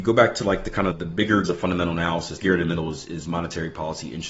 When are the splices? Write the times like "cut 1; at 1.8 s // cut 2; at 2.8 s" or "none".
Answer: cut 1; at 0.9 s // cut 2; at 1.5 s // cut 3; at 2.4 s